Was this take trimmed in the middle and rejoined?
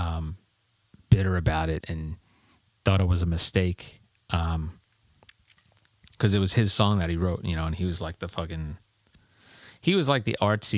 yes; 1 cut; at 1.8 s

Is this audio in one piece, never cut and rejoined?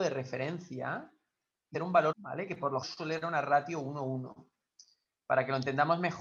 no; 4 cuts; at 1.7 s, 2.1 s, 2.8 s, 3.2 s

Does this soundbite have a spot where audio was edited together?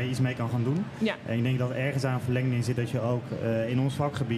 no; 0 cuts

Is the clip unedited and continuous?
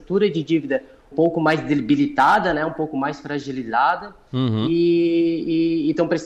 no; 1 cut; at 1.1 s

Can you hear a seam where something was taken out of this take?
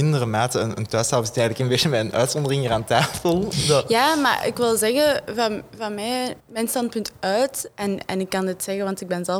yes; 1 cut; at 6.4 s

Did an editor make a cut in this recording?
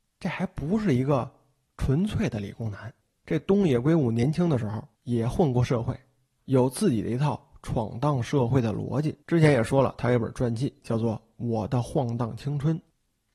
yes; 3 cuts; at 3.0 s, 4.9 s, 9.2 s

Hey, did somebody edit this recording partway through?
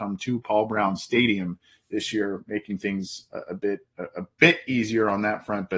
no; 0 cuts

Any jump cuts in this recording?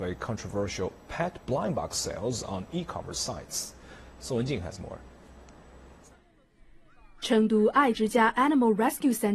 no; 0 cuts

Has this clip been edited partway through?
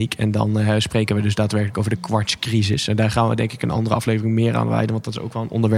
no; 0 cuts

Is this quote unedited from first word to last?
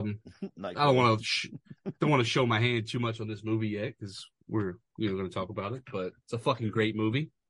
no; 1 cut; at 6.2 s

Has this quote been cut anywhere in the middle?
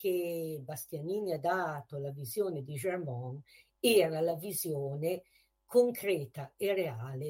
no; 0 cuts

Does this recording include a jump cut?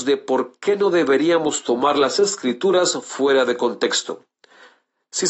no; 0 cuts

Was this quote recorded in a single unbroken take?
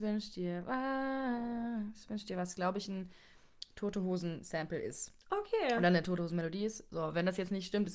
yes; 0 cuts

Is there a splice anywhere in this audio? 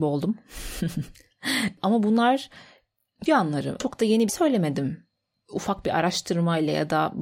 yes; 2 cuts; at 3.3 s, 4.3 s

